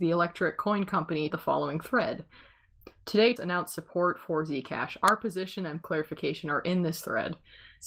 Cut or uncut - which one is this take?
cut